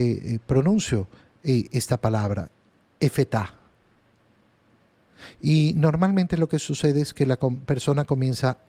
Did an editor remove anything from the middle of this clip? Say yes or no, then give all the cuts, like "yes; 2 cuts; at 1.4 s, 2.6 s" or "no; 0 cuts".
no; 0 cuts